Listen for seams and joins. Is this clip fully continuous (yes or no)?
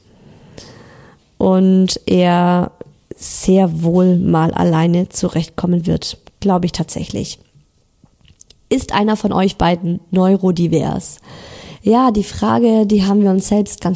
yes